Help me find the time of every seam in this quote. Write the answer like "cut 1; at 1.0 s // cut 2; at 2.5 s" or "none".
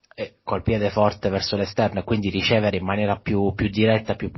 none